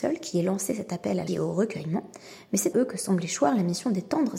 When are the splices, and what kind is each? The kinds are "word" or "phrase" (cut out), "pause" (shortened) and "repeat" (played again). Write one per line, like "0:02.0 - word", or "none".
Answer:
0:01.3 - word
0:02.7 - word